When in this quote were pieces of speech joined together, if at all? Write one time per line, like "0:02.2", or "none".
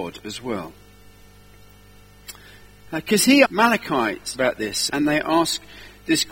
0:03.4
0:04.3
0:04.9